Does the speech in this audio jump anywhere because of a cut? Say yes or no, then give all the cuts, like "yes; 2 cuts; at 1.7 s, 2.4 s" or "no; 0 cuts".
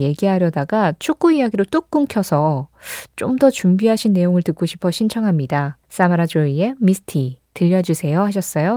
yes; 1 cut; at 5.8 s